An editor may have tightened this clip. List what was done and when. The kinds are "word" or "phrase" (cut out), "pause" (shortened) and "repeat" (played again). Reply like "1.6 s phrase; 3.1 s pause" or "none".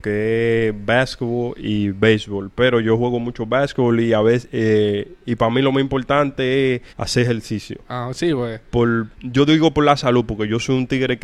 6.9 s pause; 7.8 s pause; 9.1 s pause

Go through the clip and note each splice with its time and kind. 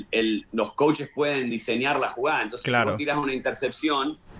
none

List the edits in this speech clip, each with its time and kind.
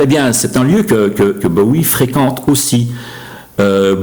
none

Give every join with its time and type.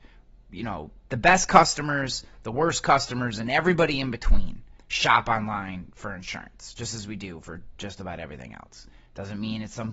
1.0 s pause; 4.8 s pause

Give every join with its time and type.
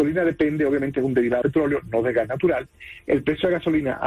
1.4 s word

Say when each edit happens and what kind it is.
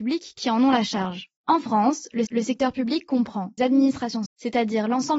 1.4 s pause; 2.3 s repeat; 3.6 s word; 4.3 s word

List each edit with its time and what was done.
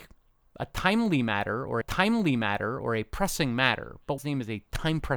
1.8 s repeat; 4.2 s phrase

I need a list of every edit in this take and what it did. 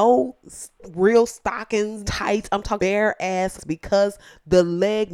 2.0 s word; 2.8 s word; 3.6 s word

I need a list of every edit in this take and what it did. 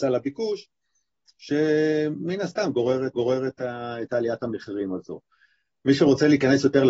3.1 s repeat

